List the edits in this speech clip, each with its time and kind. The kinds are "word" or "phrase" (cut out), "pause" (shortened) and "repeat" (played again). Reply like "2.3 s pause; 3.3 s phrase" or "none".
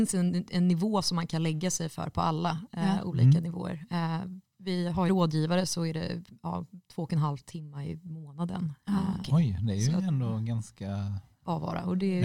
5.1 s phrase